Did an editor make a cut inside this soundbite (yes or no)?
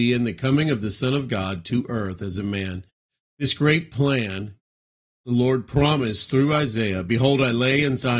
no